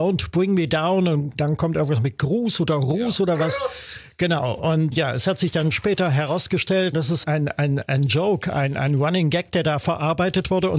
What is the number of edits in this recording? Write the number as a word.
three